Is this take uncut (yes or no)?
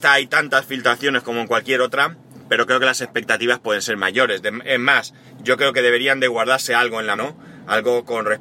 no